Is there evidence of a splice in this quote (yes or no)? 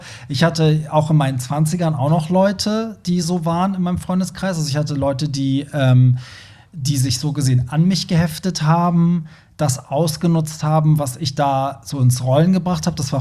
no